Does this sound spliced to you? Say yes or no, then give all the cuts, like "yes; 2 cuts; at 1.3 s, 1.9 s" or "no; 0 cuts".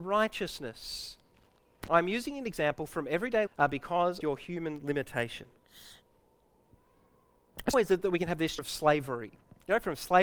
yes; 4 cuts; at 3.5 s, 4.2 s, 7.7 s, 8.6 s